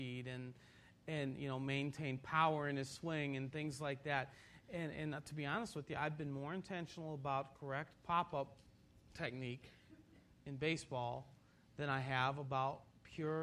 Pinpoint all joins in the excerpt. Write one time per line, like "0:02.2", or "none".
none